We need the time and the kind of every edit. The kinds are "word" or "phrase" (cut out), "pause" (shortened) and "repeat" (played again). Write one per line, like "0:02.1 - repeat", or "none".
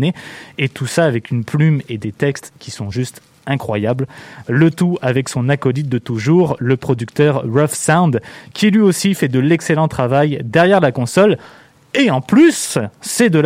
none